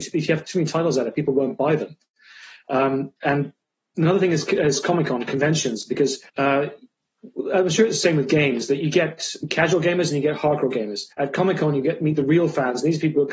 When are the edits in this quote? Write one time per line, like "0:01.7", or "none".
0:03.2
0:06.3
0:11.1